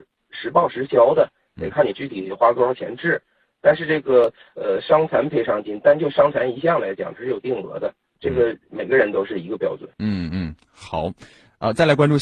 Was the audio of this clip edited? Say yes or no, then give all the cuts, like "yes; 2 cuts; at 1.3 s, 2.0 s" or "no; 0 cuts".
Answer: yes; 1 cut; at 9.9 s